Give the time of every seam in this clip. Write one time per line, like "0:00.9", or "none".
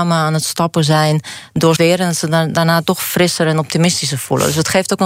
0:01.8